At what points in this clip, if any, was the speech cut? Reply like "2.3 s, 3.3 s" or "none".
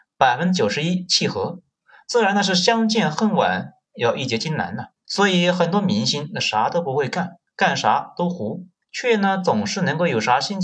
5.0 s, 8.8 s